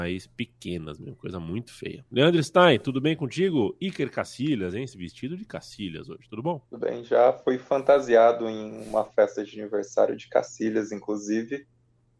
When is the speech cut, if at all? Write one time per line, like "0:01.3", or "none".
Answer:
0:06.7